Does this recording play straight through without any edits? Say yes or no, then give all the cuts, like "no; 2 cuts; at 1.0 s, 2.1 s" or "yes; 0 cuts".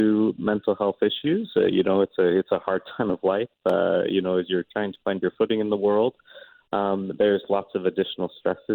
yes; 0 cuts